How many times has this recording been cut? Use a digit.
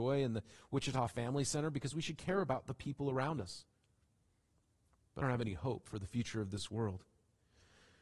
1